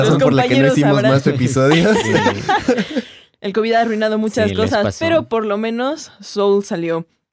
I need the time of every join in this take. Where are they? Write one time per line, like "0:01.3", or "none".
none